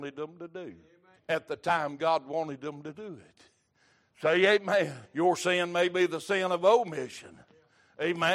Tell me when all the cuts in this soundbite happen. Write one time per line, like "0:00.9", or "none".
0:01.2
0:05.0